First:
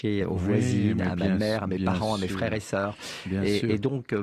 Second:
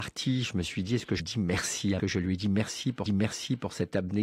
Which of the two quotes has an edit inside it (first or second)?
second